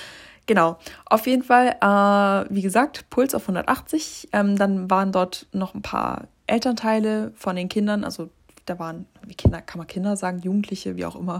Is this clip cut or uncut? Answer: uncut